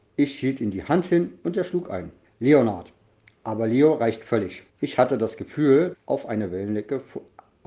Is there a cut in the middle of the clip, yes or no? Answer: yes